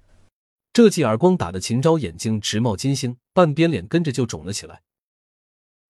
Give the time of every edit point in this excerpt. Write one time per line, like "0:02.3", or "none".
0:03.3